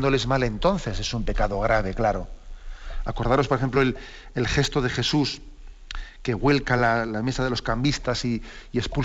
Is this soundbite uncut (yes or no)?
yes